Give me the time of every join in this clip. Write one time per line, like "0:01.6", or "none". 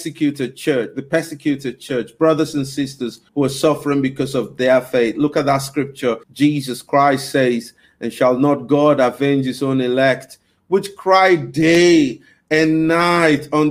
0:03.3
0:06.2